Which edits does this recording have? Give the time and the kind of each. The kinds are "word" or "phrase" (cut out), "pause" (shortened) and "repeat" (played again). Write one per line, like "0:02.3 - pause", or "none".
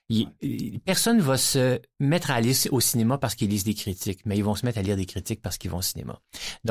none